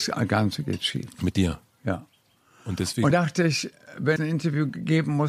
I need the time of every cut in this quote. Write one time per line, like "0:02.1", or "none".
0:03.1
0:04.2